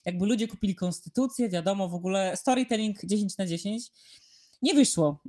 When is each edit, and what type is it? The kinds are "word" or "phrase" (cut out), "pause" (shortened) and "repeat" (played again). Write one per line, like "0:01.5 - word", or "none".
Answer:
none

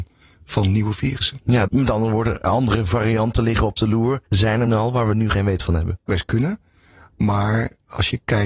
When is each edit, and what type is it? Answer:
0:01.7 - word
0:04.7 - word
0:06.1 - word

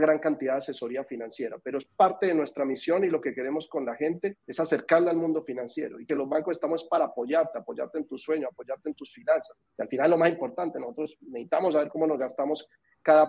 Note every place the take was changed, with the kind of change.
0:04.4 - pause
0:06.1 - phrase
0:09.7 - pause

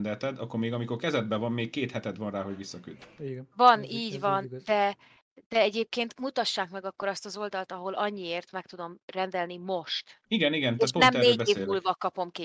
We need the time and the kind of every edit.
0:10.3 - pause

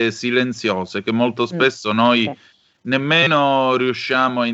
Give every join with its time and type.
none

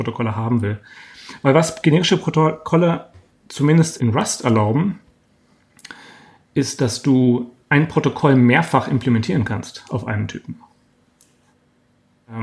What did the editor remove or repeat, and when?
0:04.0 - word
0:07.6 - pause

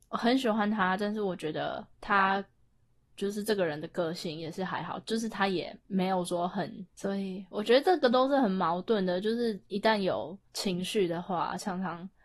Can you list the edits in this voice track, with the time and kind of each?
0:01.9 - pause
0:05.8 - pause
0:10.5 - pause

